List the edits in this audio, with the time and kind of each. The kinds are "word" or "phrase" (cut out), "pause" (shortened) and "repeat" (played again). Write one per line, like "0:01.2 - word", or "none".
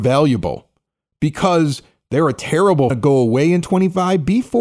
0:02.9 - phrase